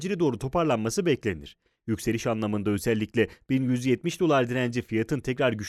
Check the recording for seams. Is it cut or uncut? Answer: uncut